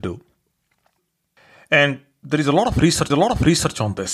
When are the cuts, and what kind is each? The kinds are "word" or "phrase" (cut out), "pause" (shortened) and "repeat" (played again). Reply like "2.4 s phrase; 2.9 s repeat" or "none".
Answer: 3.1 s repeat